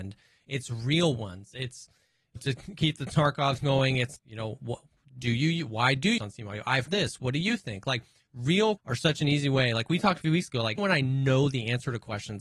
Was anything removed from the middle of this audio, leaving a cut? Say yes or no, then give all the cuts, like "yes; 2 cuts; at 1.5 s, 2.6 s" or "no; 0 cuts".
yes; 8 cuts; at 2.4 s, 3.6 s, 4.2 s, 6.2 s, 6.9 s, 8.8 s, 10.2 s, 10.8 s